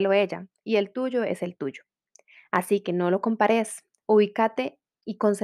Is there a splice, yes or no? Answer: no